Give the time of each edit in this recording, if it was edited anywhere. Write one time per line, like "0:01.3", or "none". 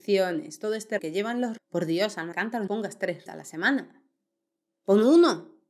0:01.0
0:01.6
0:02.3
0:02.7
0:03.3